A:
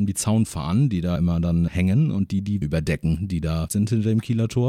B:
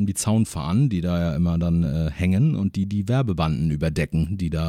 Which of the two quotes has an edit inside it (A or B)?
A